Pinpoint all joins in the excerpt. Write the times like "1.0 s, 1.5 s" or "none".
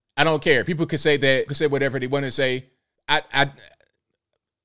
1.5 s, 3.0 s